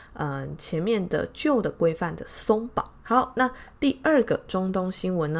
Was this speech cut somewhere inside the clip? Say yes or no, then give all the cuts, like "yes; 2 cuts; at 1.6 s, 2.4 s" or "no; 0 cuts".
yes; 1 cut; at 3.0 s